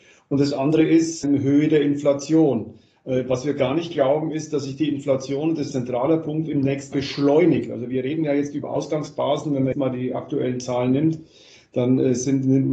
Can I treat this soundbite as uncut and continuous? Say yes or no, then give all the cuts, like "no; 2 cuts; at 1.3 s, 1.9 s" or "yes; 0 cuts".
no; 4 cuts; at 1.2 s, 5.7 s, 6.9 s, 9.7 s